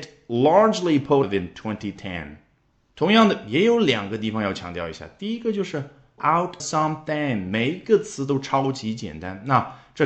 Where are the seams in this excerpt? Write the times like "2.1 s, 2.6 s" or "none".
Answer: 1.2 s, 6.2 s, 6.6 s